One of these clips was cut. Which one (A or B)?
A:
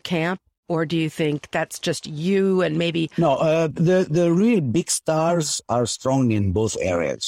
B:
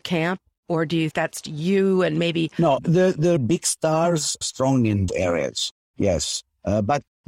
B